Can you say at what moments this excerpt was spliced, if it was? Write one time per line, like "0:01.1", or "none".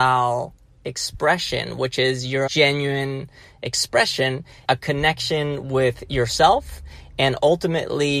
0:02.5
0:04.6